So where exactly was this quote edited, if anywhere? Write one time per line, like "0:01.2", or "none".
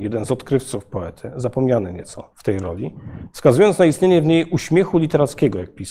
0:02.3